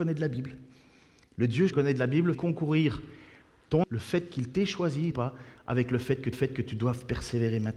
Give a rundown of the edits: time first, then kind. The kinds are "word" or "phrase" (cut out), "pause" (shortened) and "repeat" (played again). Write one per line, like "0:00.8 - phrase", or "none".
0:01.7 - word
0:02.3 - word
0:03.8 - word
0:05.1 - phrase
0:06.3 - repeat

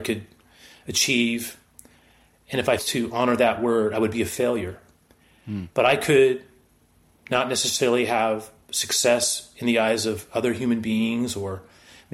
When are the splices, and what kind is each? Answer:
0:02.8 - word

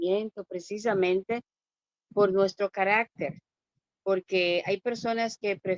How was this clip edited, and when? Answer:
none

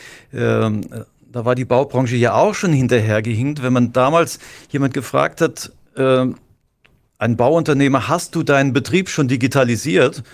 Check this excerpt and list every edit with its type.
none

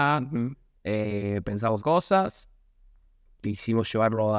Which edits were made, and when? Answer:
0:01.8 - word
0:03.4 - phrase

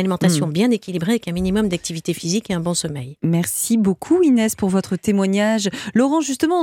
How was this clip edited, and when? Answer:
none

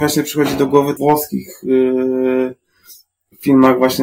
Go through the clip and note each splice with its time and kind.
0:01.0 - phrase

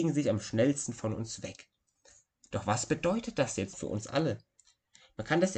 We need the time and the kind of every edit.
0:03.7 - word

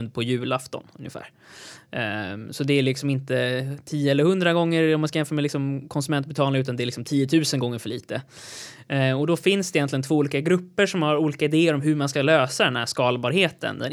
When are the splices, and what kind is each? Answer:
none

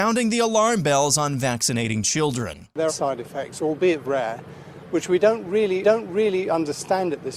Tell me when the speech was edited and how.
0:02.9 - word
0:04.0 - word
0:05.8 - repeat

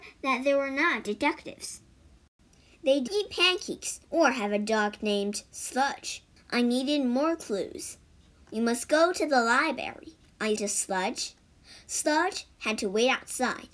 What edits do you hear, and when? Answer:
0:03.1 - word
0:04.0 - pause
0:06.4 - pause
0:10.6 - word

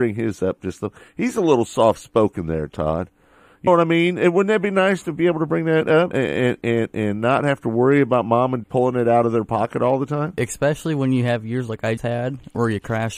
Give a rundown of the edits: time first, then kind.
0:03.7 - word
0:06.1 - word
0:08.6 - word
0:12.0 - word

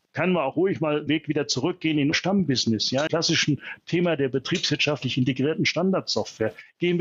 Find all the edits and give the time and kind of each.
0:01.1 - word
0:02.1 - word
0:03.1 - word

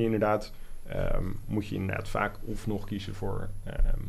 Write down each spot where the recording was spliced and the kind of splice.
none

